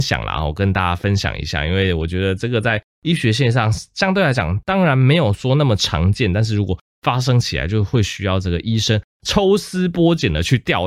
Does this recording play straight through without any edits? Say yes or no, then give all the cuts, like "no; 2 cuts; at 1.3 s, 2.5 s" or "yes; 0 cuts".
yes; 0 cuts